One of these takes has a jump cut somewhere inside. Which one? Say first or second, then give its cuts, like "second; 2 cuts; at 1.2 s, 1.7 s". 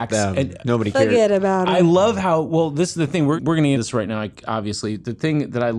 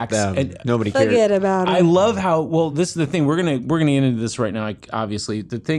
first; 2 cuts; at 3.4 s, 3.7 s